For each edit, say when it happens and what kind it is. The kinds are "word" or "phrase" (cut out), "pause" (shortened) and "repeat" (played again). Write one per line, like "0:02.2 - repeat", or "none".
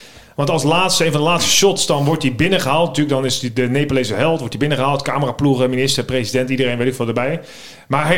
none